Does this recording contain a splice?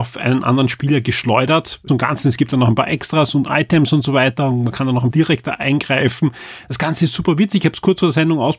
yes; 2 cuts; at 1.9 s, 5.1 s

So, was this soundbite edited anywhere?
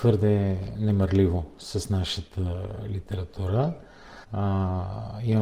yes; 1 cut; at 4.2 s

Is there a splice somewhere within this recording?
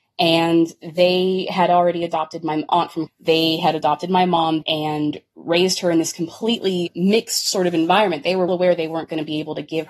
yes; 3 cuts; at 3.1 s, 4.6 s, 8.5 s

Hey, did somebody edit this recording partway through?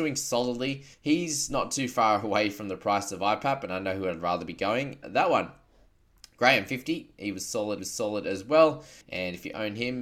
yes; 4 cuts; at 0.9 s, 5.0 s, 7.8 s, 9.0 s

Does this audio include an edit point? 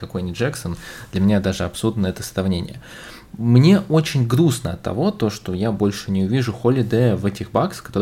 no; 0 cuts

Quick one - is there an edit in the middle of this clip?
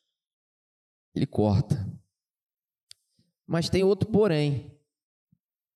no; 0 cuts

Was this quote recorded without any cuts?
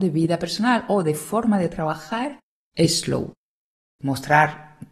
yes; 0 cuts

